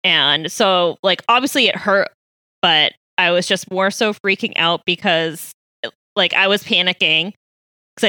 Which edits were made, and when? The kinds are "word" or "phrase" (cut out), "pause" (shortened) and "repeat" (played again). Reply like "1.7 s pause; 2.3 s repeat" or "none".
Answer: none